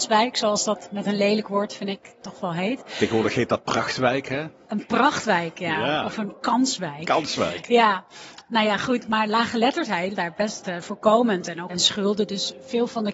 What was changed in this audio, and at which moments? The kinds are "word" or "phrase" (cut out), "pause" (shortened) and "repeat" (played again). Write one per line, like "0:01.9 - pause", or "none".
0:10.2 - word
0:10.8 - word
0:11.7 - word